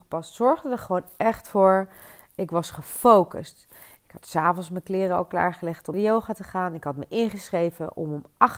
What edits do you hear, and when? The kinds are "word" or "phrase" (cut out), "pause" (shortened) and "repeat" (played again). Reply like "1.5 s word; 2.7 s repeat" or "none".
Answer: 5.9 s word